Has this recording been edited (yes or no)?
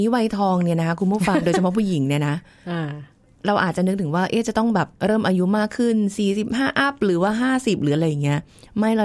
yes